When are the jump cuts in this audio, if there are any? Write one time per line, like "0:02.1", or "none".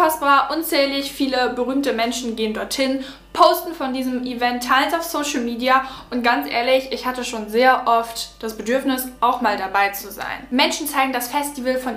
none